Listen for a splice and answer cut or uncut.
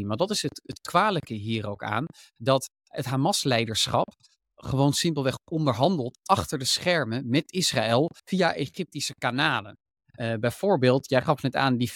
cut